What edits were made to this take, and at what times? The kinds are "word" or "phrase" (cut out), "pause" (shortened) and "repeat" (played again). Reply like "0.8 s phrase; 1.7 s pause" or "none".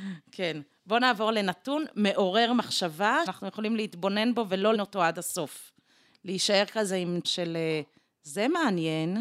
3.3 s word; 4.7 s word; 7.2 s word